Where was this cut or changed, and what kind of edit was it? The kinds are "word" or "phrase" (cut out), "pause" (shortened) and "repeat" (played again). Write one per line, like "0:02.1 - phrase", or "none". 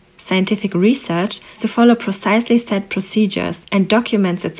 0:01.6 - word